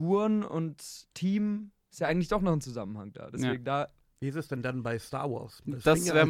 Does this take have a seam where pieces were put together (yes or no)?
no